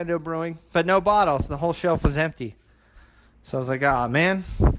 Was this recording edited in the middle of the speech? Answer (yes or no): no